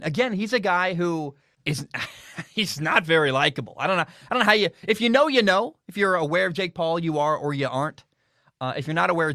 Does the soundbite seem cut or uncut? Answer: cut